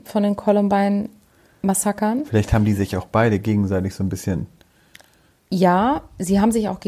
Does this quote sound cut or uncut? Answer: uncut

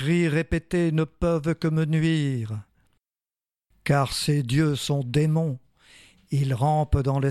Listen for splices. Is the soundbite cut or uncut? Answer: uncut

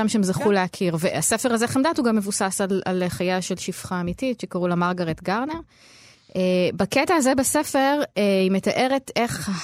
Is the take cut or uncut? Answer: uncut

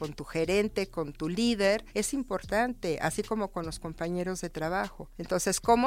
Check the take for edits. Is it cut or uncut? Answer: uncut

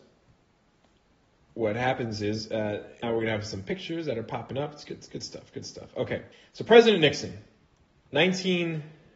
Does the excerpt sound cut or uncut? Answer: cut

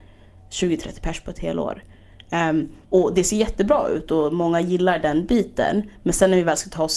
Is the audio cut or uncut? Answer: cut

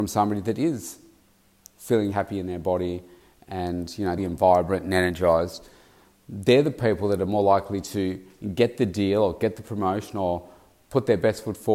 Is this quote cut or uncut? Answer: cut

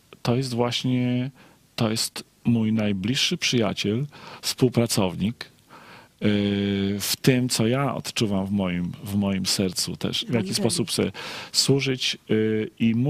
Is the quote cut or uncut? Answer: uncut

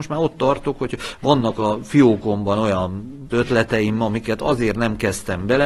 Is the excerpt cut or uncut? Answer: cut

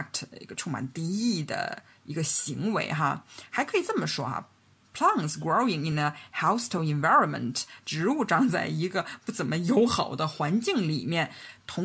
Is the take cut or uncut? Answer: uncut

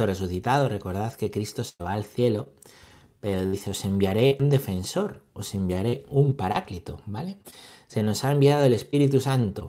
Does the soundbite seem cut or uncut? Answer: uncut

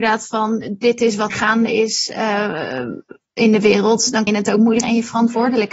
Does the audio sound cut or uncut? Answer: cut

